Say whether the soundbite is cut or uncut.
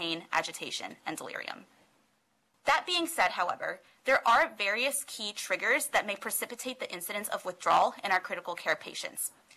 uncut